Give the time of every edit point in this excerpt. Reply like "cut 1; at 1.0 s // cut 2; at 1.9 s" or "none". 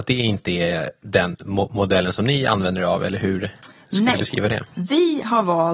none

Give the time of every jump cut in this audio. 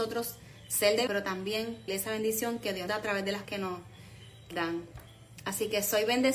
cut 1; at 1.1 s // cut 2; at 1.9 s // cut 3; at 2.9 s // cut 4; at 3.4 s // cut 5; at 4.5 s

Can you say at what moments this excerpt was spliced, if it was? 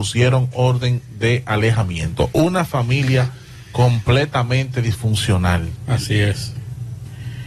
none

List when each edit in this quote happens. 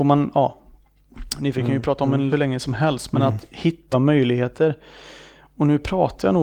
cut 1; at 1.5 s // cut 2; at 2.3 s // cut 3; at 3.9 s

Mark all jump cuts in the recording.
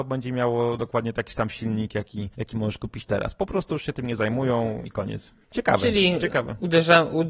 cut 1; at 2.3 s // cut 2; at 4.8 s // cut 3; at 5.4 s

